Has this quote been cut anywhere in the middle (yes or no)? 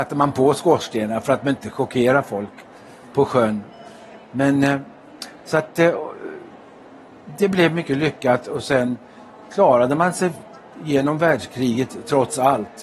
no